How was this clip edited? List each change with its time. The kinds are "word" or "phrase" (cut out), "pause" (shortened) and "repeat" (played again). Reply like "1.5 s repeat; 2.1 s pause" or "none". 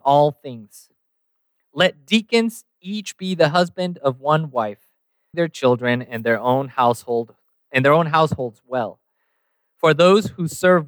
5.3 s word